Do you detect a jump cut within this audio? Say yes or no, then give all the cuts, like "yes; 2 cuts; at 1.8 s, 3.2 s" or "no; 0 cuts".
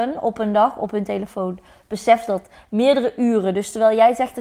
no; 0 cuts